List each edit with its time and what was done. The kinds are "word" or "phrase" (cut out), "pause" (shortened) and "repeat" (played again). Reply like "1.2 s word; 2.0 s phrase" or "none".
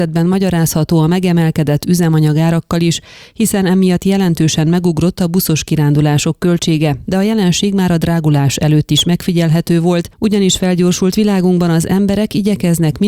none

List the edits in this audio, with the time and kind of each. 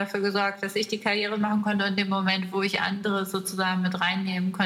none

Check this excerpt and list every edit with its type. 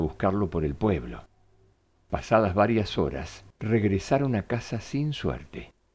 none

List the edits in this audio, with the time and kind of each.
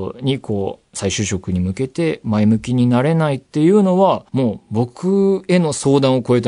4.3 s pause

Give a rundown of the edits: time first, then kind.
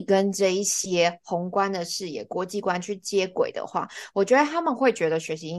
none

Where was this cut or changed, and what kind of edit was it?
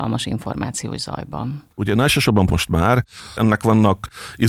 1.7 s pause; 2.5 s word

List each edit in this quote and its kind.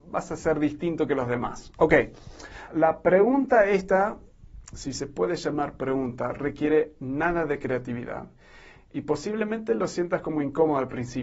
2.7 s word

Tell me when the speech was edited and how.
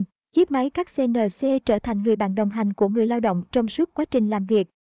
none

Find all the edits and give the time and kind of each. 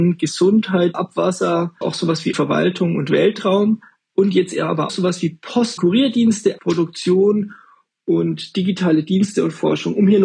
0.9 s word; 1.8 s word; 2.3 s word; 4.9 s word; 5.8 s word; 6.6 s word

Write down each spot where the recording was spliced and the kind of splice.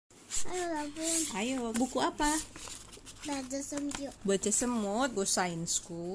1.7 s phrase; 4.2 s pause; 5.2 s word

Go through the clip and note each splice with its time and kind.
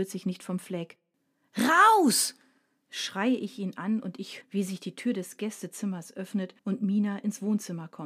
4.4 s word; 6.6 s pause

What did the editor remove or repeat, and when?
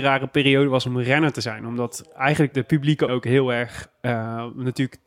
2.5 s word; 3.1 s word

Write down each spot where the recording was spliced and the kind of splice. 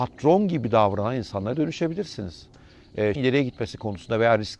3.2 s word

